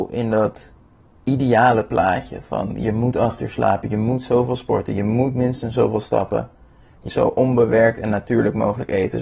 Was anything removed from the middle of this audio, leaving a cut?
yes; 1 cut; at 7.1 s

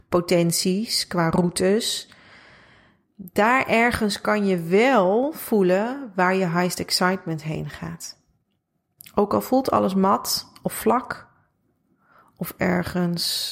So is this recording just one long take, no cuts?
yes; 0 cuts

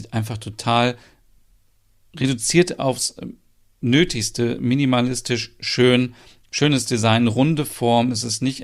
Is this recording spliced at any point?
no; 0 cuts

